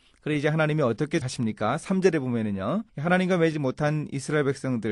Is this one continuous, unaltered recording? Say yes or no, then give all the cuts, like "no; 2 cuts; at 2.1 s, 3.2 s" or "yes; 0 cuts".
no; 3 cuts; at 1.2 s, 2.9 s, 3.5 s